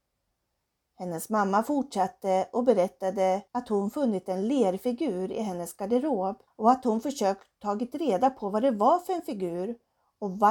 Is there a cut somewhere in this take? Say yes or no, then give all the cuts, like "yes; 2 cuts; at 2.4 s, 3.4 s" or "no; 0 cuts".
yes; 2 cuts; at 3.5 s, 6.5 s